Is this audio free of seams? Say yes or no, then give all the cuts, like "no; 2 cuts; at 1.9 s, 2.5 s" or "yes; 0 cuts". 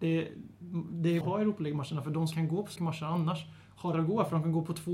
no; 4 cuts; at 1.2 s, 2.3 s, 2.8 s, 3.9 s